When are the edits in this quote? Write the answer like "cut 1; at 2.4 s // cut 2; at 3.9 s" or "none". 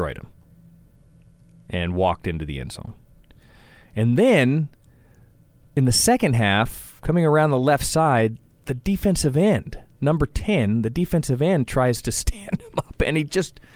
none